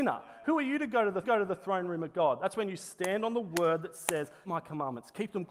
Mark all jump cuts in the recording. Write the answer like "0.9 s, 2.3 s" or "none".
1.2 s, 4.4 s